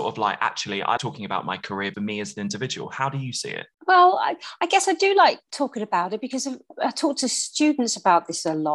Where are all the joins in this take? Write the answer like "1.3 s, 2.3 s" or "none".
1.0 s, 1.9 s